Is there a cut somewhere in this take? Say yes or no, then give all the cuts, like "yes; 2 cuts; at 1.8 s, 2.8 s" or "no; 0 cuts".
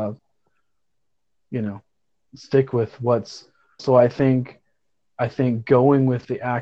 yes; 2 cuts; at 2.3 s, 3.8 s